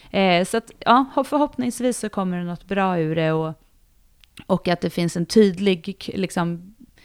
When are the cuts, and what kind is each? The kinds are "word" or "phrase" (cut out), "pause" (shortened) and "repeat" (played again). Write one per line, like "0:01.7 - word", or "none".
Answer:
none